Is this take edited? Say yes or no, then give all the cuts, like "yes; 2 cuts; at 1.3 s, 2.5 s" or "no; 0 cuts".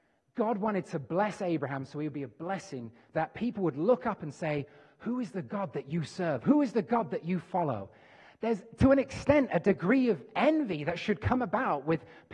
yes; 1 cut; at 3.1 s